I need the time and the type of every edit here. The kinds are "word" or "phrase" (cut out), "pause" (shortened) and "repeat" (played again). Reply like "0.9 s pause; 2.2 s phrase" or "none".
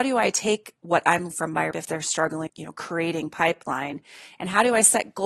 1.3 s word; 1.7 s word; 2.5 s word